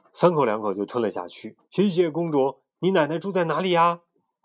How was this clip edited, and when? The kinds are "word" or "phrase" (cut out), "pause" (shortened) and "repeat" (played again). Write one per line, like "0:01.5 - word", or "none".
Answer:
0:01.6 - pause